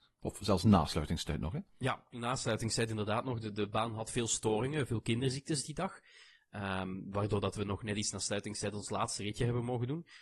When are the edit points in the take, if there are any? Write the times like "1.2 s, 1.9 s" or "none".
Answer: none